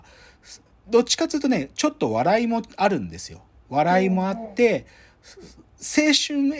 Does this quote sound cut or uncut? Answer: uncut